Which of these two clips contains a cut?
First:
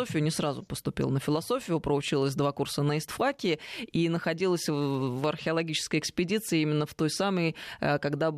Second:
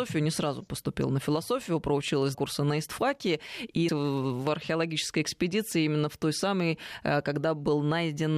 second; 2 cuts; at 2.3 s, 3.9 s

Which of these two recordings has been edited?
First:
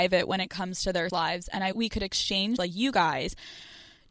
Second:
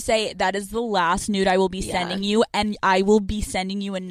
first; 3 cuts; at 1.1 s, 1.7 s, 2.6 s

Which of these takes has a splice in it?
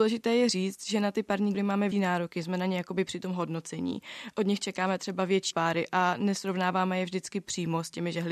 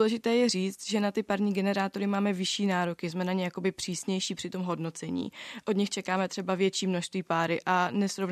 first; 4 cuts; at 1.5 s, 1.9 s, 3.1 s, 5.5 s

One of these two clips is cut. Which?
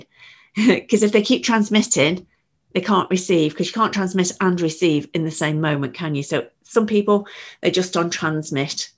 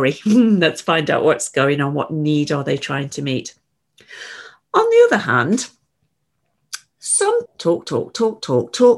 second; 1 cut; at 7.5 s

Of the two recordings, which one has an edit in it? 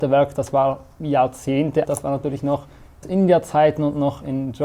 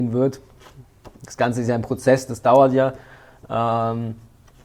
first; 2 cuts; at 1.8 s, 3.0 s

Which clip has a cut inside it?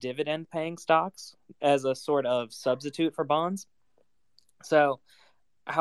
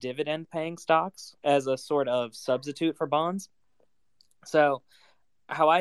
second; 1 cut; at 1.4 s

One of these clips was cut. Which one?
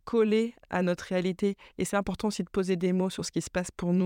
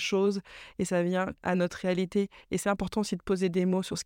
second; 1 cut; at 1.4 s

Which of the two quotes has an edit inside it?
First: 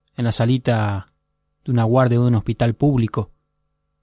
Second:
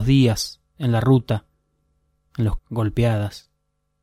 second; 1 cut; at 2.6 s

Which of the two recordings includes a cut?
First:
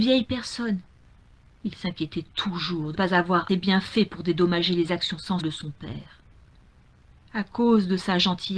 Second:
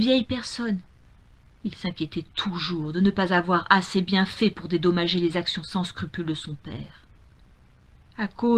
first; 3 cuts; at 2.9 s, 3.5 s, 5.4 s

